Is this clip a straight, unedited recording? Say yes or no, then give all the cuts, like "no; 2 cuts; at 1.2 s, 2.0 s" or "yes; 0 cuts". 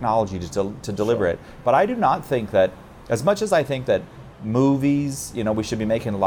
yes; 0 cuts